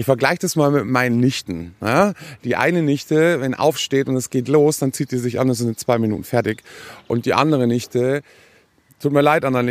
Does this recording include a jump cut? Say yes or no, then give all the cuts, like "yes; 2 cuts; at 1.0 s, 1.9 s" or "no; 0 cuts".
no; 0 cuts